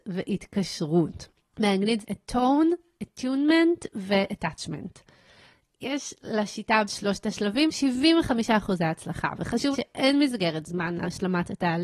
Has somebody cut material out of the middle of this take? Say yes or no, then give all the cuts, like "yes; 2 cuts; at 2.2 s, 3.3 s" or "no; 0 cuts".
yes; 4 cuts; at 2.0 s, 6.8 s, 7.7 s, 9.7 s